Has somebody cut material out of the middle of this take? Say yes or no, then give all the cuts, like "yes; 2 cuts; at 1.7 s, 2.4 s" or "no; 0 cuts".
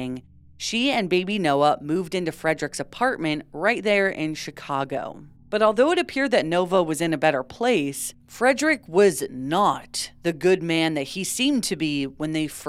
yes; 1 cut; at 5.4 s